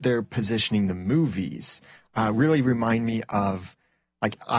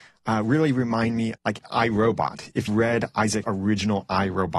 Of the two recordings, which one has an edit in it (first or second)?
second